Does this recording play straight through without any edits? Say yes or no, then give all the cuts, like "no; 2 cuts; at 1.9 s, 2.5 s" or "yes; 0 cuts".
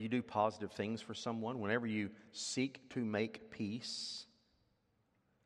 yes; 0 cuts